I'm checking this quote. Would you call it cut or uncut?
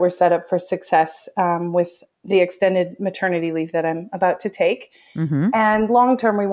uncut